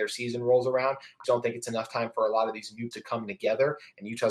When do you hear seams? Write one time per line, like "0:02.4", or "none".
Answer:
0:01.2
0:02.9